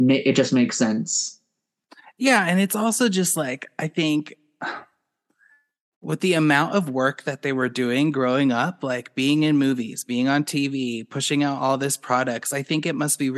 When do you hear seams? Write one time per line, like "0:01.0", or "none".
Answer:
none